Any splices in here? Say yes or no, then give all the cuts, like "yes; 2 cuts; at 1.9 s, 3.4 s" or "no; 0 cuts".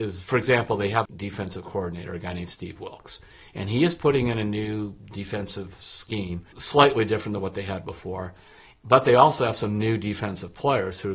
yes; 2 cuts; at 1.1 s, 6.5 s